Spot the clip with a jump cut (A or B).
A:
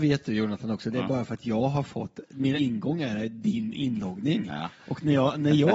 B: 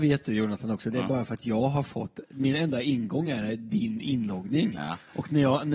A